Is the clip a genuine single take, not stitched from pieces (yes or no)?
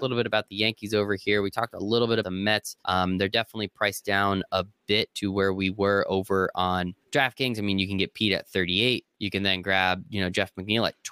no